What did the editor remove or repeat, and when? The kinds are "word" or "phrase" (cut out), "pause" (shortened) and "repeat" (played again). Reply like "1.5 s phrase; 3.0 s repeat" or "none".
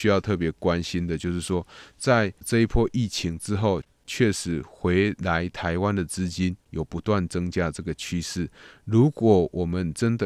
6.6 s pause